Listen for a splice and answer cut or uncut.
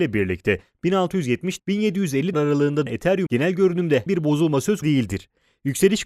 cut